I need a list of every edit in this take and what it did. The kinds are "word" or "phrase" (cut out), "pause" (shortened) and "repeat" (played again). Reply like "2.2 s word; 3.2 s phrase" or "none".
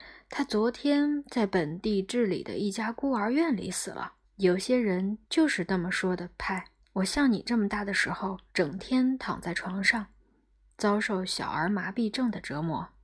4.2 s pause; 5.2 s pause; 6.8 s pause; 8.5 s pause